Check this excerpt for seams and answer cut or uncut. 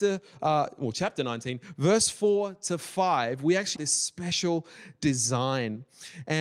cut